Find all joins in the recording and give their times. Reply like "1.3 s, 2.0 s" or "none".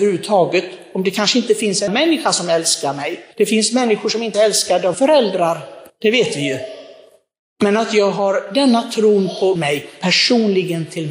1.9 s, 3.3 s, 4.3 s, 4.9 s, 5.9 s, 7.4 s, 9.6 s